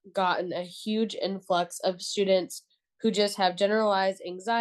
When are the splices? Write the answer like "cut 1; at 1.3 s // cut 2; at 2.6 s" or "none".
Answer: none